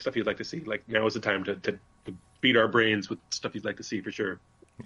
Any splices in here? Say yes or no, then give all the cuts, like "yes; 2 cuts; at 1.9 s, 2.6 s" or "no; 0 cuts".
no; 0 cuts